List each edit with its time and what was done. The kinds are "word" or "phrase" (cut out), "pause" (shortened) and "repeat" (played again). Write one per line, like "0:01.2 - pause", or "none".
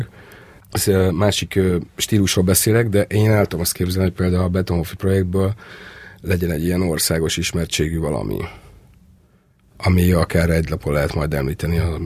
none

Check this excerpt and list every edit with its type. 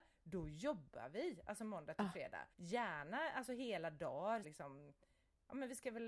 0:02.5 - pause
0:04.4 - phrase

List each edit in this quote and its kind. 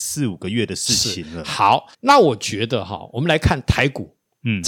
0:01.9 - pause

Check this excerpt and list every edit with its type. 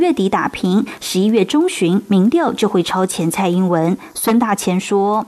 none

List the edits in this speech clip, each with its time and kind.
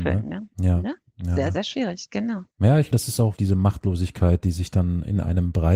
0:02.5 - pause
0:02.9 - word
0:03.4 - word

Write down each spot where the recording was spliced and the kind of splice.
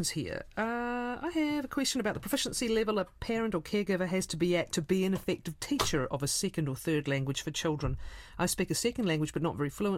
none

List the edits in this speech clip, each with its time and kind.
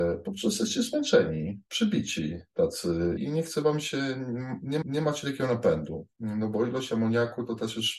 0:03.2 - word
0:04.8 - repeat

